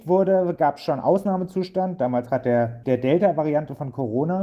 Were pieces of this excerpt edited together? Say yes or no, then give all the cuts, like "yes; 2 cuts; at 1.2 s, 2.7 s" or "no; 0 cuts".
yes; 2 cuts; at 2.3 s, 2.8 s